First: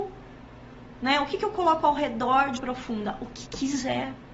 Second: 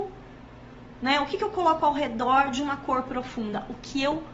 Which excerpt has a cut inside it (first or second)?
first